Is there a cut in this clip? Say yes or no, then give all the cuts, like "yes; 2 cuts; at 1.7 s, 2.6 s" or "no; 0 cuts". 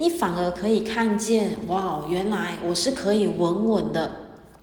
no; 0 cuts